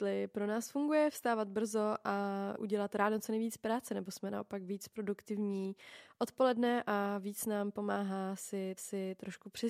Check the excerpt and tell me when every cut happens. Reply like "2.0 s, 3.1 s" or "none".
2.6 s, 8.8 s